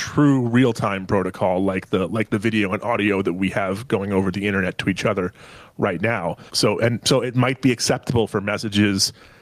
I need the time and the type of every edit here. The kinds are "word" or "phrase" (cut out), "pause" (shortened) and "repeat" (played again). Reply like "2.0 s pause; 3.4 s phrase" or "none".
6.5 s pause

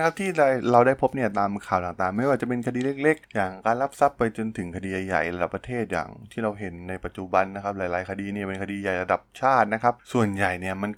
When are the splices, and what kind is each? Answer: 10.0 s pause

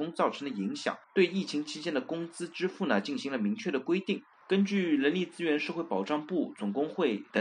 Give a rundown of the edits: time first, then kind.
1.0 s pause; 4.3 s pause

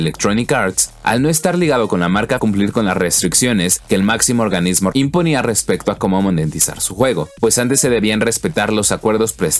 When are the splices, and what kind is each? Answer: 2.4 s phrase; 4.9 s phrase

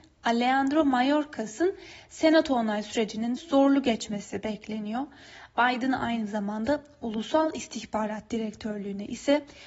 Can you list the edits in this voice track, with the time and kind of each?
3.4 s word

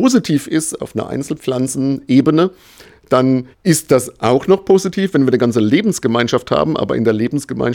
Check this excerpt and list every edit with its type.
3.5 s pause

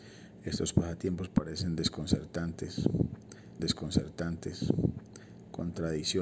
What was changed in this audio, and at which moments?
3.6 s repeat

